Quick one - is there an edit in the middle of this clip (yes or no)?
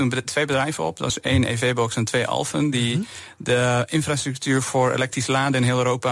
no